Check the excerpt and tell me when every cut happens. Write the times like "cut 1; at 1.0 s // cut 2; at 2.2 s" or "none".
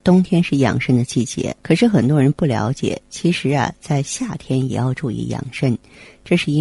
cut 1; at 1.6 s